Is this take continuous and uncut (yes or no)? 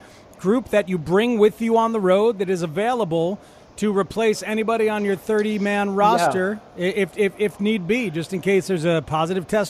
yes